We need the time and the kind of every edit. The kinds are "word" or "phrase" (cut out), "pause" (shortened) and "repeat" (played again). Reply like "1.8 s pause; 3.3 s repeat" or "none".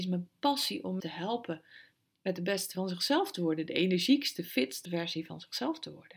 1.0 s word; 2.7 s word; 4.8 s word